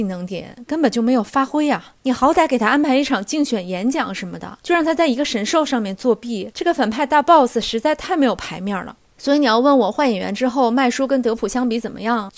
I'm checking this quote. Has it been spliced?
no; 0 cuts

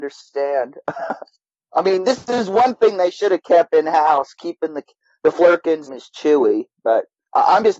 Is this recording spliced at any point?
yes; 1 cut; at 5.9 s

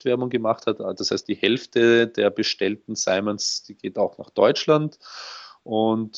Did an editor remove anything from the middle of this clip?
yes; 1 cut; at 1.2 s

